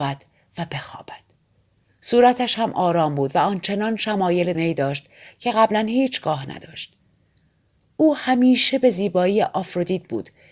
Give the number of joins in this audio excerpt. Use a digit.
1